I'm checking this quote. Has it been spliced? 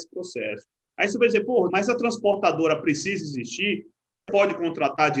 yes; 2 cuts; at 1.7 s, 4.3 s

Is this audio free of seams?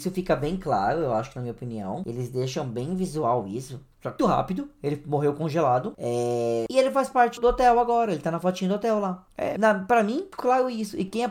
no; 3 cuts; at 4.2 s, 7.4 s, 10.4 s

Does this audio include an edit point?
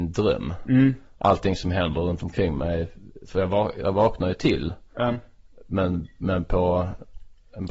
no; 0 cuts

